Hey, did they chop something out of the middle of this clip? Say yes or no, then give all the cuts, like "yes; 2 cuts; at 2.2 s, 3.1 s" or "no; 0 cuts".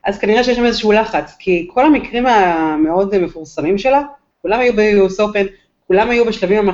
no; 0 cuts